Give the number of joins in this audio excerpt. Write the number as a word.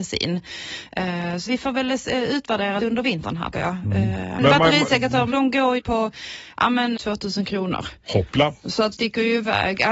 eight